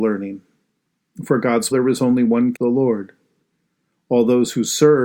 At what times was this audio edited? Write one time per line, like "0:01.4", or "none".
0:01.7
0:02.5